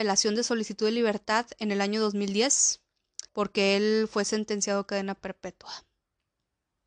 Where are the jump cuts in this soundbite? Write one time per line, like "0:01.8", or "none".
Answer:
0:03.3